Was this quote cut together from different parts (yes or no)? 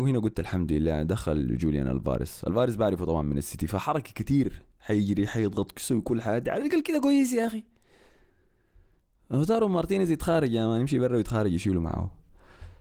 no